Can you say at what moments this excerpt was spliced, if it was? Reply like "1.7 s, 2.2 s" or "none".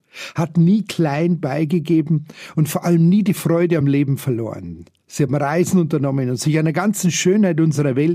none